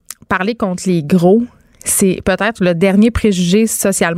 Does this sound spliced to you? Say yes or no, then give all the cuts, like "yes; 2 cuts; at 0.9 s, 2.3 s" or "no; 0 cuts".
no; 0 cuts